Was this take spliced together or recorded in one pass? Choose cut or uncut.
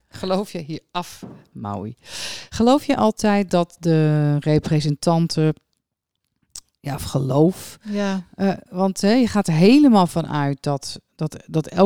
uncut